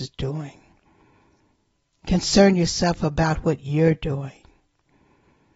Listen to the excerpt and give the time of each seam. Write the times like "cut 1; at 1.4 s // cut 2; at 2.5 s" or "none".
none